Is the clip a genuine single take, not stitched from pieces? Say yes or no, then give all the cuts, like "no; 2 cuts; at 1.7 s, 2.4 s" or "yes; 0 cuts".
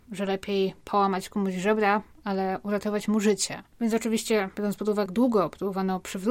no; 2 cuts; at 3.7 s, 5.1 s